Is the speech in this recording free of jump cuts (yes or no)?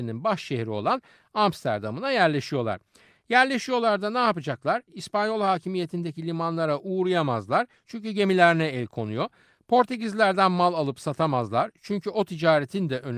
yes